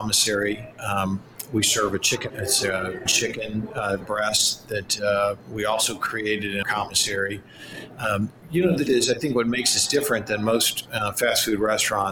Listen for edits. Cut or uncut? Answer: cut